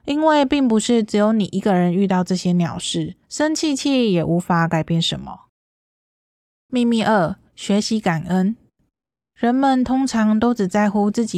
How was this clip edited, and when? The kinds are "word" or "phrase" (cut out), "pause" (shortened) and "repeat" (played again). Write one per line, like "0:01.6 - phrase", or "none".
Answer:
0:03.2 - pause
0:07.5 - pause